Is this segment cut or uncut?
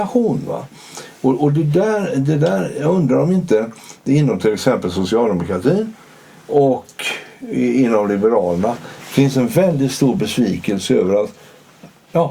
uncut